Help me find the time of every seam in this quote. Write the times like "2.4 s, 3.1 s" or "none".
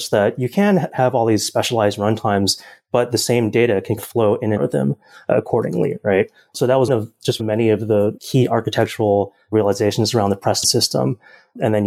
4.0 s, 4.6 s, 6.9 s, 7.4 s, 8.2 s, 10.6 s

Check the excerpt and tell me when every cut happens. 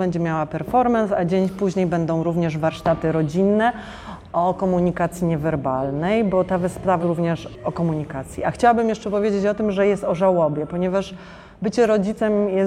7.0 s

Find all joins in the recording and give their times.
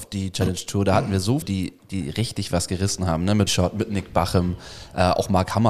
1.4 s, 3.5 s

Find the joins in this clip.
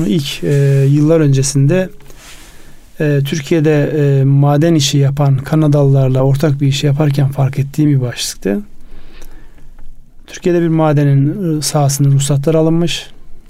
none

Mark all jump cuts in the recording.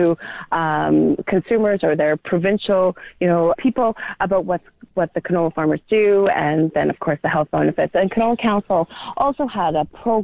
3.5 s

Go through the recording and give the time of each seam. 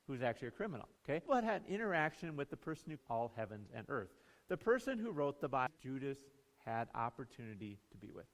1.0 s, 3.0 s, 5.8 s

